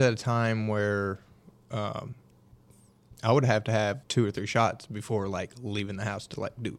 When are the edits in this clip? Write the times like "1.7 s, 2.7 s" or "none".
4.0 s